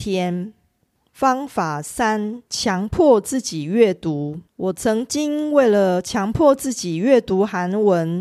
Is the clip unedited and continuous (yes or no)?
no